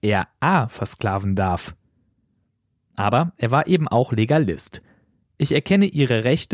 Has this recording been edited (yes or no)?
no